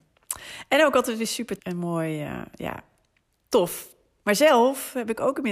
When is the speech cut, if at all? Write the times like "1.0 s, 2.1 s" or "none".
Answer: 1.6 s